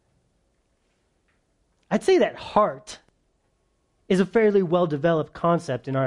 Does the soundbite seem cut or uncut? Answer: uncut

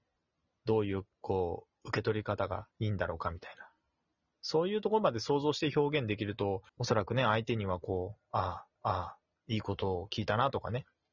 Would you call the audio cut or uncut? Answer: cut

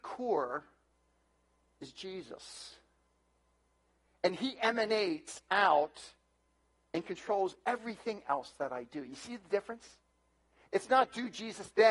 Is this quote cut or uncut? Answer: uncut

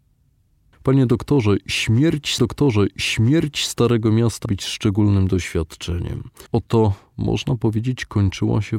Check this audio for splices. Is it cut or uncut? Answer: cut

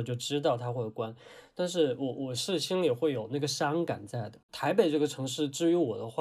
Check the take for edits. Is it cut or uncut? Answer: cut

